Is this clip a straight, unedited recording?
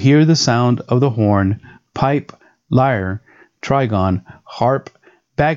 yes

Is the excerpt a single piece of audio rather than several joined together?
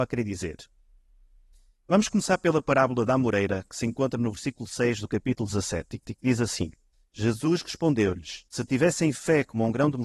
no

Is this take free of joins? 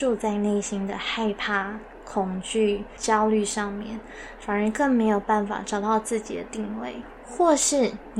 yes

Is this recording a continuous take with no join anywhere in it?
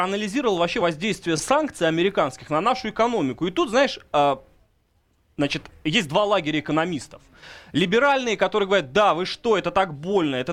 yes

